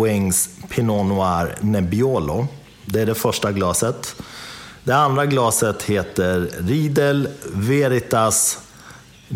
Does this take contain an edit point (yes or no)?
no